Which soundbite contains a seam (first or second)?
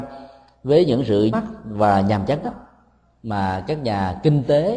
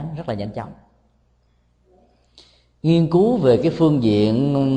first